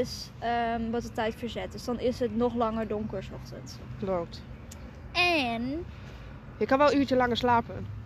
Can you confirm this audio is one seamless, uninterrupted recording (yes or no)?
yes